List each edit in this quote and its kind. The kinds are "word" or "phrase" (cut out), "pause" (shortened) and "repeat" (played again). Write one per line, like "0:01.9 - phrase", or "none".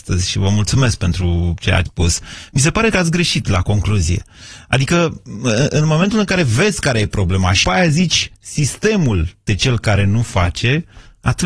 0:01.9 - word
0:02.9 - word
0:07.6 - word
0:09.5 - word